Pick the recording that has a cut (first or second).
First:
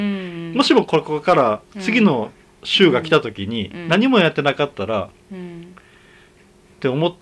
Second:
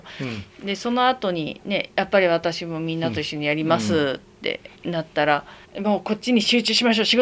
second